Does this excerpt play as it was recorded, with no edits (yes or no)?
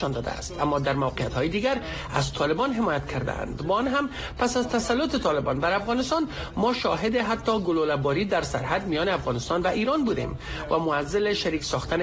yes